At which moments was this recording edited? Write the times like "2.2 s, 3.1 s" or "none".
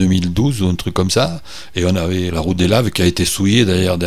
2.3 s